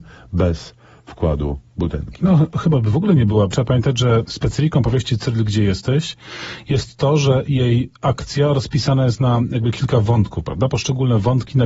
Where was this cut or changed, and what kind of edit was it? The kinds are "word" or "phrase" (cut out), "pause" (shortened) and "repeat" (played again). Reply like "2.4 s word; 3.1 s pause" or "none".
3.5 s word; 8.0 s pause